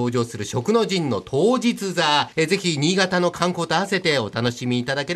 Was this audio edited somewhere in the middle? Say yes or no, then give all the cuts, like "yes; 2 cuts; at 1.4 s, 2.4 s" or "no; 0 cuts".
yes; 1 cut; at 2.3 s